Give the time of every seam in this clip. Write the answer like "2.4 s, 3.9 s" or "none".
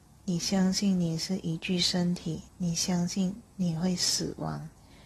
2.5 s

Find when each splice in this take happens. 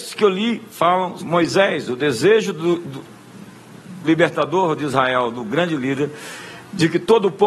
1.2 s, 4.0 s

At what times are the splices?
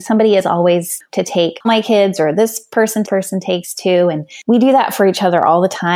1.1 s, 1.6 s, 3.0 s

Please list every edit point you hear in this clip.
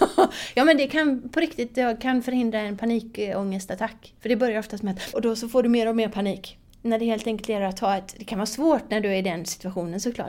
4.2 s, 5.1 s

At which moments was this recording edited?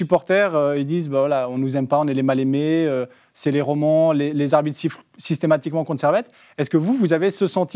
none

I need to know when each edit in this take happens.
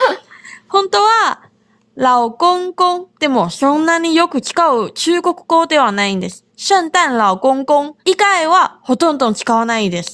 3.1 s, 6.5 s, 8.0 s

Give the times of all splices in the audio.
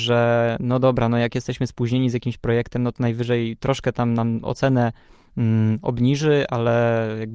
none

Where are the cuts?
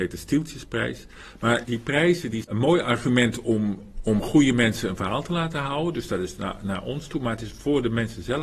2.4 s

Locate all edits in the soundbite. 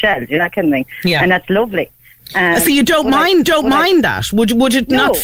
3.4 s

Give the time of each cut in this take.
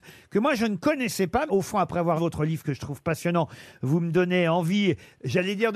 1.5 s, 2.2 s

